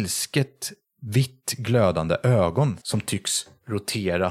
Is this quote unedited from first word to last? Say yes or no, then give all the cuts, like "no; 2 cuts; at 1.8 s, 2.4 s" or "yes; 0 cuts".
no; 1 cut; at 2.8 s